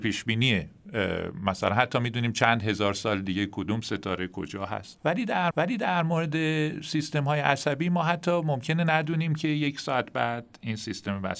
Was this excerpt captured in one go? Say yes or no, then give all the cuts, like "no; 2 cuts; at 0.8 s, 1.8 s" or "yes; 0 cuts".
no; 1 cut; at 5.5 s